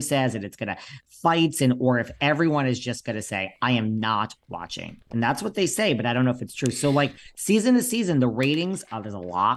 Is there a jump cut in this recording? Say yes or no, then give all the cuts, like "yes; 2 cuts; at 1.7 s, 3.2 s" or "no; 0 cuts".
no; 0 cuts